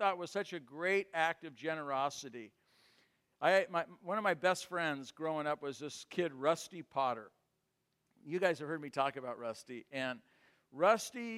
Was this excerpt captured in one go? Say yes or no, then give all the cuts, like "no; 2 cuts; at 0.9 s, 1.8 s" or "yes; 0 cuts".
yes; 0 cuts